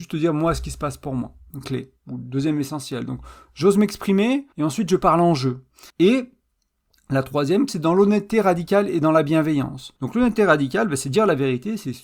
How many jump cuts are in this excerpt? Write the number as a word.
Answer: five